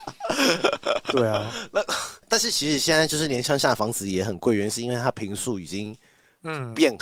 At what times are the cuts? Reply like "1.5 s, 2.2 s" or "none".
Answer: none

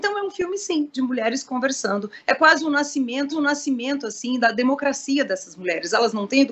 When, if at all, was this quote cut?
3.3 s

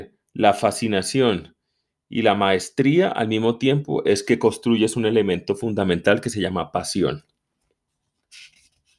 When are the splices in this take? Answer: none

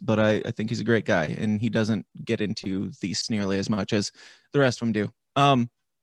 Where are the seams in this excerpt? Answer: 3.2 s

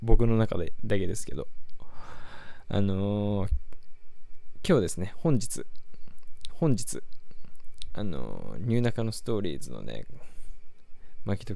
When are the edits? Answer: 6.5 s

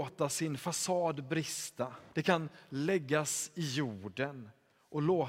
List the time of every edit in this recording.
2.1 s

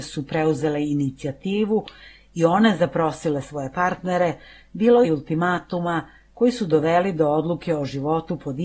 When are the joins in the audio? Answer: 5.0 s

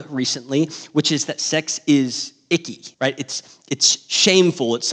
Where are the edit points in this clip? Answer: 2.9 s

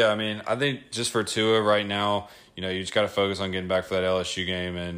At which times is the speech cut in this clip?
none

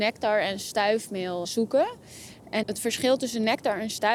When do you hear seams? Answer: 1.4 s, 2.6 s

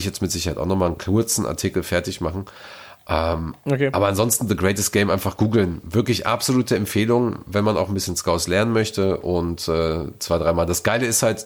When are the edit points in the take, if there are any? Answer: none

